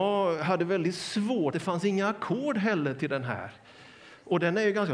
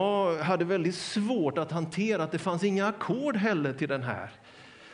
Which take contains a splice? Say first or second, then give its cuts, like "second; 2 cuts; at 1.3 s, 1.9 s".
first; 1 cut; at 1.5 s